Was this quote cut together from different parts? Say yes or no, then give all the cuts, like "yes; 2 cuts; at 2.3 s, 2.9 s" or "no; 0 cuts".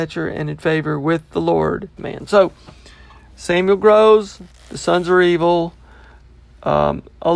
yes; 1 cut; at 2.0 s